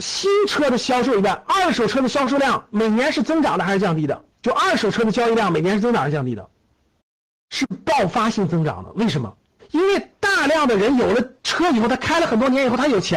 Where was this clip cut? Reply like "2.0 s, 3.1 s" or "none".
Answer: 4.3 s, 7.0 s, 9.6 s, 11.4 s